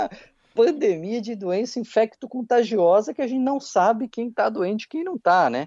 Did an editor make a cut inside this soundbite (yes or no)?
no